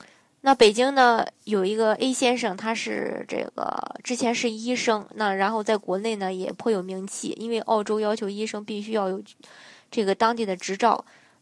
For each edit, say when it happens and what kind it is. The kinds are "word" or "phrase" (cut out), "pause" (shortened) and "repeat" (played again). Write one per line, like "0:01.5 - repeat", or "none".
none